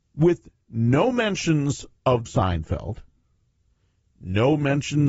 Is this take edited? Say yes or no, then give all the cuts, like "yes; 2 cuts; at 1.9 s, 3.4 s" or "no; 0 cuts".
yes; 1 cut; at 2.3 s